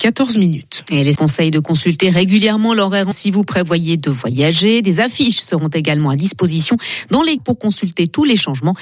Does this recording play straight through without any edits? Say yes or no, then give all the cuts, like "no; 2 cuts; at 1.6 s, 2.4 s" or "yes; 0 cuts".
no; 3 cuts; at 1.1 s, 3.1 s, 7.4 s